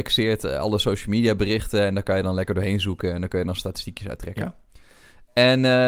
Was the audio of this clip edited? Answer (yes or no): no